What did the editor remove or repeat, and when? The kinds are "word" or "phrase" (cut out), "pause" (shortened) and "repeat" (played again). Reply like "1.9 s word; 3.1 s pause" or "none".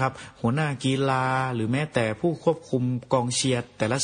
none